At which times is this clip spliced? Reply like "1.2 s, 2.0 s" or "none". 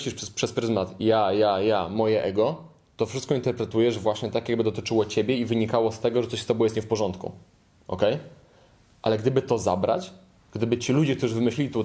none